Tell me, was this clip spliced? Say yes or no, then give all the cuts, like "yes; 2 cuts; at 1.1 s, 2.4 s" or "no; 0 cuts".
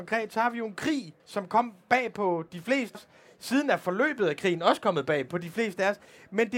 yes; 2 cuts; at 1.2 s, 2.9 s